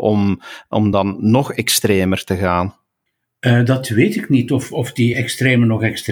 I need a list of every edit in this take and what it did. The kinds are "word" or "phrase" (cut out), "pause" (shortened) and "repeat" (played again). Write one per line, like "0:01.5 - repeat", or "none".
none